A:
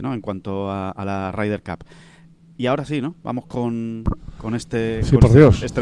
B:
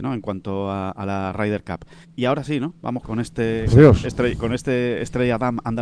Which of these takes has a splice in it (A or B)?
B